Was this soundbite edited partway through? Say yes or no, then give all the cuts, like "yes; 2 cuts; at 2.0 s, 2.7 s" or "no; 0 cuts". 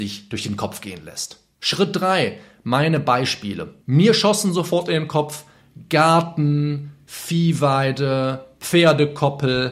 yes; 1 cut; at 3.8 s